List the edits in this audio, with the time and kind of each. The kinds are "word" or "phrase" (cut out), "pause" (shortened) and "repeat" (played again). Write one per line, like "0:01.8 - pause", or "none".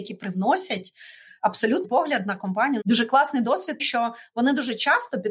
0:01.8 - word
0:02.8 - phrase
0:03.8 - word